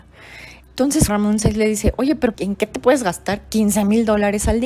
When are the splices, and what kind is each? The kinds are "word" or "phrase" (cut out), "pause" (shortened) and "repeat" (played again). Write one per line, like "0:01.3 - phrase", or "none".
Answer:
0:01.1 - word
0:02.3 - word